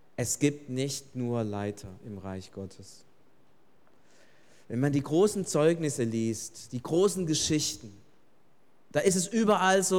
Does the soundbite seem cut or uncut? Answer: uncut